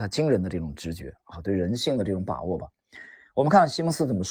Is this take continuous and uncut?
yes; 0 cuts

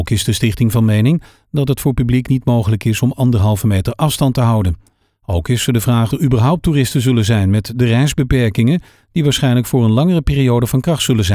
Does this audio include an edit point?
yes; 1 cut; at 6.1 s

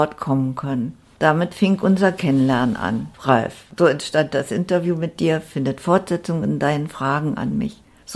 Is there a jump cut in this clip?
no; 0 cuts

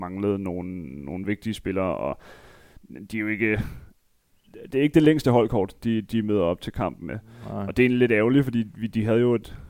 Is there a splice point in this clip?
no; 0 cuts

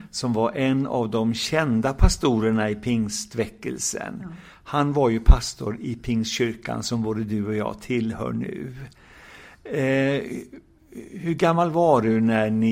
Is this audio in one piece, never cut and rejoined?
yes; 0 cuts

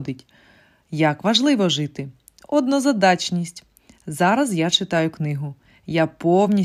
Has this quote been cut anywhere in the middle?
no; 0 cuts

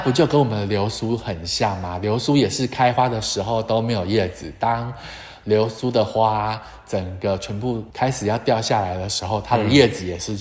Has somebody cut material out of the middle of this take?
yes; 1 cut; at 7.9 s

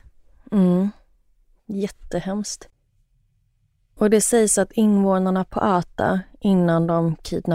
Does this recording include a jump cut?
no; 0 cuts

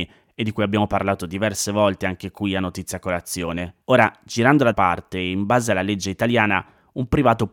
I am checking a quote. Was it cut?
yes; 2 cuts; at 3.8 s, 4.7 s

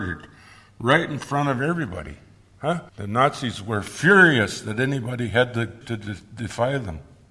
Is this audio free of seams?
no; 2 cuts; at 2.9 s, 5.8 s

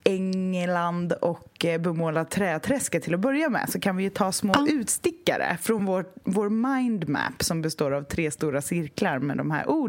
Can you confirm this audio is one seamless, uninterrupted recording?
yes; 0 cuts

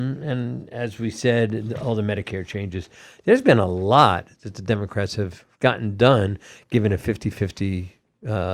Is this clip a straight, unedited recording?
yes; 0 cuts

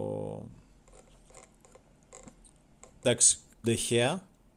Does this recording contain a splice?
yes; 1 cut; at 3.6 s

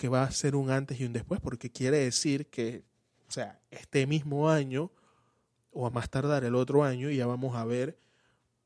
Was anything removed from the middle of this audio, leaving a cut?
no; 0 cuts

